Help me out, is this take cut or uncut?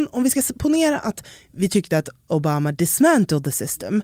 uncut